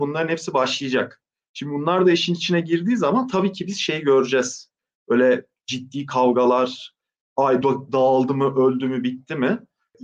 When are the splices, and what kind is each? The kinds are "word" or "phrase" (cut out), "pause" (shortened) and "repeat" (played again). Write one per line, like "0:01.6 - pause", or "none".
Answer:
none